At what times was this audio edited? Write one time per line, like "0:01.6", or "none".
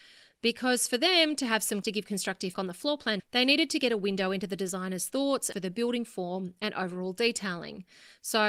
0:01.8
0:02.5
0:03.2
0:05.5